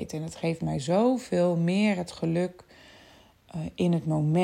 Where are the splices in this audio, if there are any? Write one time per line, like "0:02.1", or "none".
none